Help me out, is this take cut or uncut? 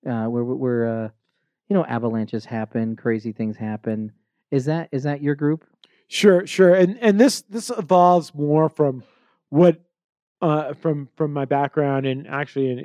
uncut